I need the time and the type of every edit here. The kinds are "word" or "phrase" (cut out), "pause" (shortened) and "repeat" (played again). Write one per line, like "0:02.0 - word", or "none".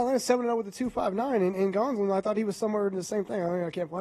none